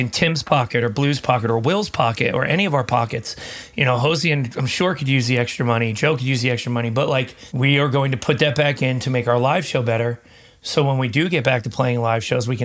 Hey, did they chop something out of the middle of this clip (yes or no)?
no